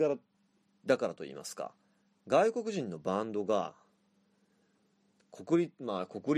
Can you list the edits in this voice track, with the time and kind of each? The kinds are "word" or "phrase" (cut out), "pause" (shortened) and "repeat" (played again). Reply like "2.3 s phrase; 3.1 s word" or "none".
none